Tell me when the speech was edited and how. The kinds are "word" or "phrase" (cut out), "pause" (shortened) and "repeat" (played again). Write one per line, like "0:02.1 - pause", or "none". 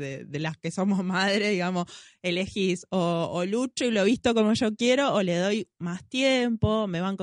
none